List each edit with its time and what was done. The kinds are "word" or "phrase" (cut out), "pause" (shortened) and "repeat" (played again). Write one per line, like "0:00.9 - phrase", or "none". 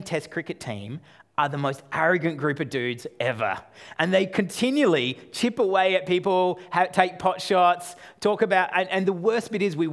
none